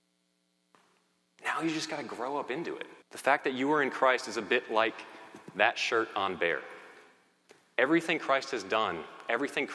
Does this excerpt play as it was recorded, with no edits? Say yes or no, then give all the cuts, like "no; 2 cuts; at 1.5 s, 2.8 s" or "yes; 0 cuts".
no; 1 cut; at 3.0 s